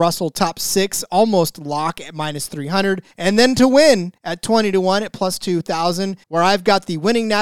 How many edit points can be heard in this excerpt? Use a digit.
3